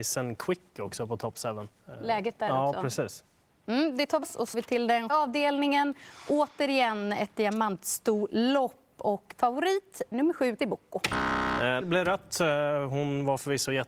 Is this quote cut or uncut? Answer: cut